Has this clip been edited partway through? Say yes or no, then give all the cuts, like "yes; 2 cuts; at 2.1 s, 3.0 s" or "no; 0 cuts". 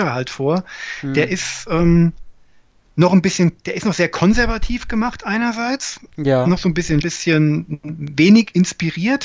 yes; 1 cut; at 7.0 s